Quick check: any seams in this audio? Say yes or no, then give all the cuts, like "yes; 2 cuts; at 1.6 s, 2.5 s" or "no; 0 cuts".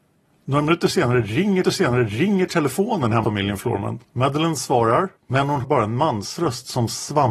yes; 5 cuts; at 1.6 s, 3.2 s, 4.0 s, 5.2 s, 5.6 s